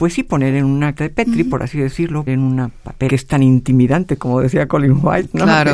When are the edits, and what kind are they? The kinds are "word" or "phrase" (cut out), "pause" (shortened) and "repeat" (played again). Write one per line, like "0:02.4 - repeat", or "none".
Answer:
0:01.0 - word
0:02.3 - word
0:03.1 - phrase